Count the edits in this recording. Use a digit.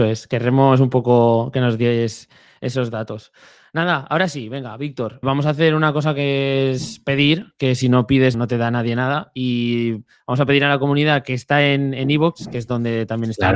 2